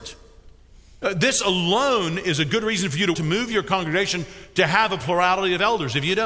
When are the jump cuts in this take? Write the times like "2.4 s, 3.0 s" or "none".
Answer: 3.1 s